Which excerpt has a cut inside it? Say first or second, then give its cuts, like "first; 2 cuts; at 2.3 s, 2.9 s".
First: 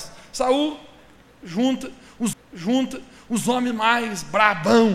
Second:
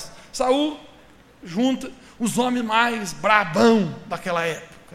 first; 1 cut; at 2.3 s